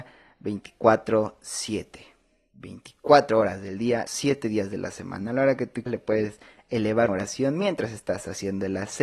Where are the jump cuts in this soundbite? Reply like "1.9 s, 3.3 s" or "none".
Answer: 4.1 s, 5.9 s, 7.1 s